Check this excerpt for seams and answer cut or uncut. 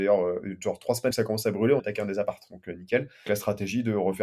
cut